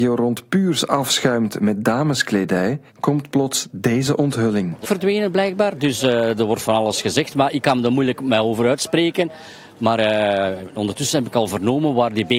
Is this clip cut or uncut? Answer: cut